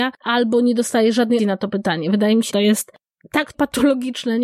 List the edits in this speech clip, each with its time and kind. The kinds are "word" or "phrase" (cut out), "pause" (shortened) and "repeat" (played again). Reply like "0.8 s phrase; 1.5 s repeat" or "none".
1.4 s word; 2.5 s word; 3.5 s word